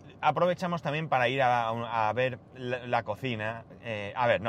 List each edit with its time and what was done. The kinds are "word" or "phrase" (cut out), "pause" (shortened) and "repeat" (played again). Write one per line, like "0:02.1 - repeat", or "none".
0:02.5 - pause